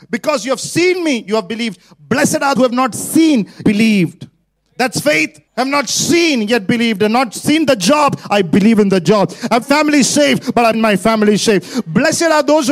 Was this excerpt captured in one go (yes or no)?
no